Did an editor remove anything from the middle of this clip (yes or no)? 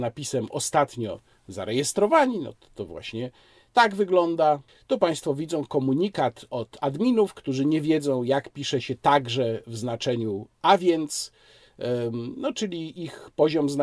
no